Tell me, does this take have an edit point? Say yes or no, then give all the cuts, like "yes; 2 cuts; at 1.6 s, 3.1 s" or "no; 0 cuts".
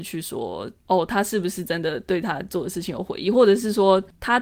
no; 0 cuts